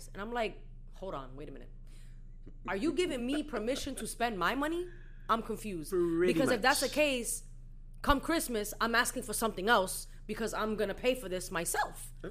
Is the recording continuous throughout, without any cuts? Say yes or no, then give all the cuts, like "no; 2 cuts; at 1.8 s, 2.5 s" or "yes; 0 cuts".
yes; 0 cuts